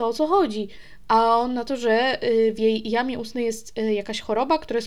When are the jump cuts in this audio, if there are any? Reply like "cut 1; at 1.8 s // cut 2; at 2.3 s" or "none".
none